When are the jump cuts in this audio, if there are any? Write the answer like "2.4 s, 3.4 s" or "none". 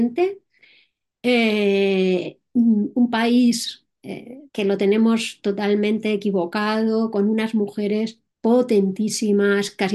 4.5 s, 8.3 s